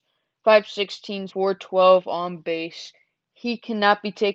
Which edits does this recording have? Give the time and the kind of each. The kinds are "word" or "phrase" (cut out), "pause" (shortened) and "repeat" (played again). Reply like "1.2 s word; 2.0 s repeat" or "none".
1.3 s word